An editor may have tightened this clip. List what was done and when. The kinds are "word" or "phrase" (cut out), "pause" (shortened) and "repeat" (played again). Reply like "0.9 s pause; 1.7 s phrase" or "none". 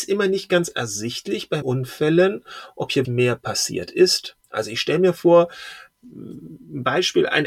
1.6 s word; 3.0 s word; 4.4 s pause